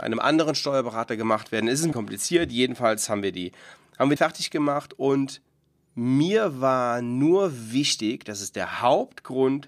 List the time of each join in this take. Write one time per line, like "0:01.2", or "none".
0:01.9
0:04.2